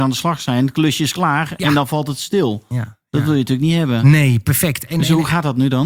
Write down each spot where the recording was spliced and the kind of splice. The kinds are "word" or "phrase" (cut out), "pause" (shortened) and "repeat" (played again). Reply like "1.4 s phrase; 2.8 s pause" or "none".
none